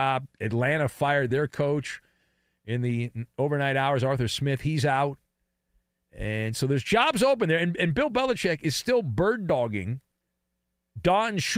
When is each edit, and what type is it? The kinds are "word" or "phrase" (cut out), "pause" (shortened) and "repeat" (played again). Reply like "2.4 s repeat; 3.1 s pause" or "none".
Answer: none